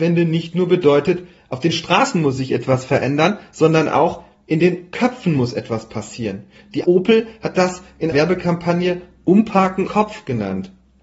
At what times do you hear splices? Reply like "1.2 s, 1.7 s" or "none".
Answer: 6.8 s, 8.1 s, 9.9 s